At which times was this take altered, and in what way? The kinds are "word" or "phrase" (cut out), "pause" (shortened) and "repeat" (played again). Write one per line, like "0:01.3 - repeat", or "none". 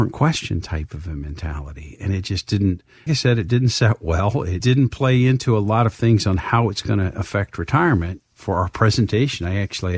0:03.1 - word